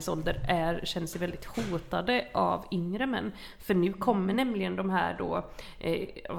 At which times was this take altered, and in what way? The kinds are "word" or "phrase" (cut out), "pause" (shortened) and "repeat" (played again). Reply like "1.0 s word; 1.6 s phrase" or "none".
none